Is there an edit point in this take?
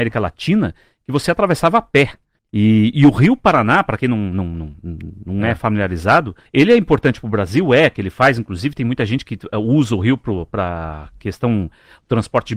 yes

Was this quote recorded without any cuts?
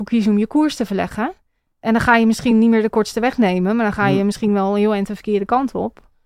yes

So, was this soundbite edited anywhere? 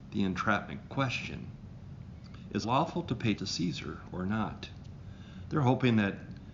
yes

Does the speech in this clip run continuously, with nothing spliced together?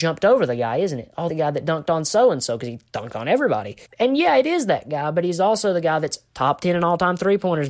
no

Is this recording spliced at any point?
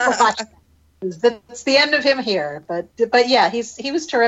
no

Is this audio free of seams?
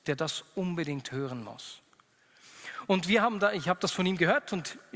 yes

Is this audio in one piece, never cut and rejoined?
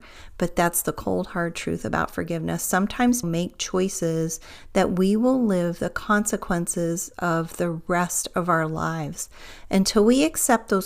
no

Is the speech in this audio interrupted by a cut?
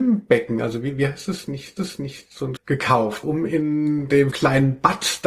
yes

